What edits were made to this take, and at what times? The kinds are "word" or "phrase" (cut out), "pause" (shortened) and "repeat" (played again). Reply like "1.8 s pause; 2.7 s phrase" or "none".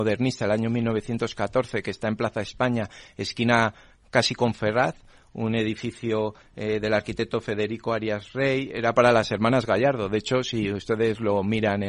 none